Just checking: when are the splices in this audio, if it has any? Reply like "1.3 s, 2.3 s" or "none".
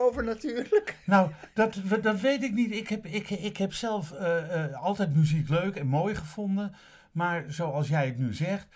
none